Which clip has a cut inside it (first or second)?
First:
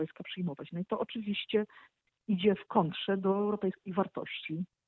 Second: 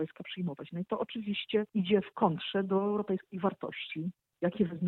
second